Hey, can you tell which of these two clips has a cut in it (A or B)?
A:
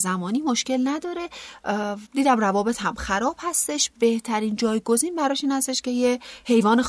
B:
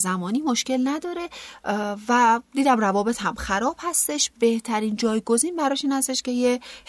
A